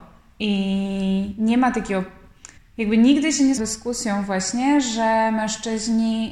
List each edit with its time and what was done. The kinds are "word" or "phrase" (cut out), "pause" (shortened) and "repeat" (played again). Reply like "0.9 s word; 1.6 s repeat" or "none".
2.6 s pause; 3.6 s phrase

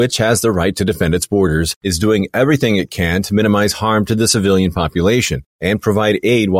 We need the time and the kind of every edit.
none

